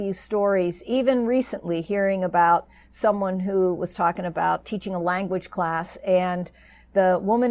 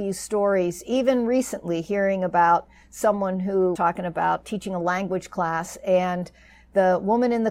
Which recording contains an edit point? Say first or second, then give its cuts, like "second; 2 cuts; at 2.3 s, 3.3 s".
second; 1 cut; at 3.8 s